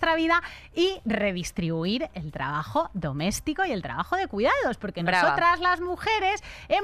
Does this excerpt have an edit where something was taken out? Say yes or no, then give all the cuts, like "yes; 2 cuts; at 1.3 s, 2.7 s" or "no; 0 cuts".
no; 0 cuts